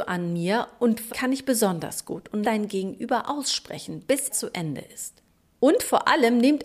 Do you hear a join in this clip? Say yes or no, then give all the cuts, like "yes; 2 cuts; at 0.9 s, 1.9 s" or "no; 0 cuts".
yes; 3 cuts; at 1.1 s, 2.4 s, 4.3 s